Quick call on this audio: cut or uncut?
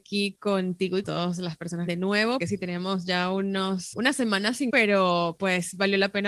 cut